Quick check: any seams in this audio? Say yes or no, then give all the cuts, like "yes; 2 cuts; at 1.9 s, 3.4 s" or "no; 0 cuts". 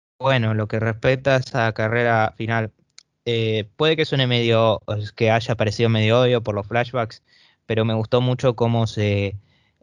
no; 0 cuts